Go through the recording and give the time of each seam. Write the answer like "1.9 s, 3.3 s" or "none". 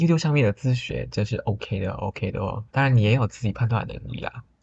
2.7 s

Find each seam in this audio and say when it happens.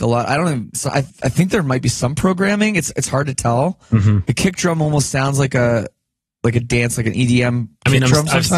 1.1 s

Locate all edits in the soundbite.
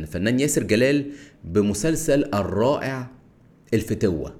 none

